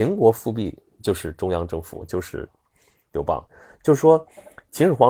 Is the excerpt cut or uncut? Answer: uncut